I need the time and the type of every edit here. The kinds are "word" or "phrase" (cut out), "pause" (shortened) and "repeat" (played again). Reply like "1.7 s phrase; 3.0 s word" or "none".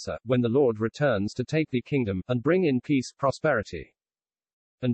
none